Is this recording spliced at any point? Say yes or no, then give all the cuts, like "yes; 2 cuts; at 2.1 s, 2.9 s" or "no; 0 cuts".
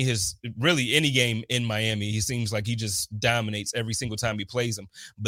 no; 0 cuts